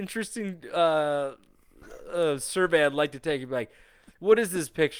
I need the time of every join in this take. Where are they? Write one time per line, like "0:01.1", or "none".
none

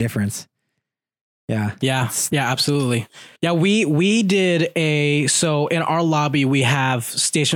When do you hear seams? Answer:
0:03.3

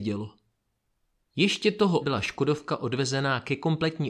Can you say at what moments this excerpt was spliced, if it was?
0:02.0

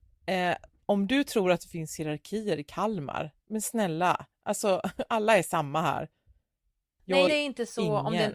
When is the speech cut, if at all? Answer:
0:03.4
0:07.3

